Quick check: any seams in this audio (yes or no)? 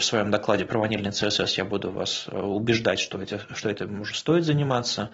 no